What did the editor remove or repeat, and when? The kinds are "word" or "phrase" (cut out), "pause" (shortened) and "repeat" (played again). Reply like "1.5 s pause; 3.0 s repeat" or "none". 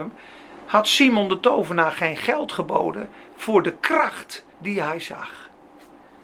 4.5 s pause